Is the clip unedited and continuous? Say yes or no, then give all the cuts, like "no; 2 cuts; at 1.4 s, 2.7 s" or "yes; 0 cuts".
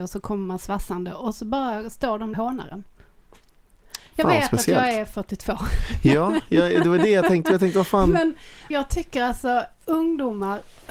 no; 2 cuts; at 2.3 s, 8.7 s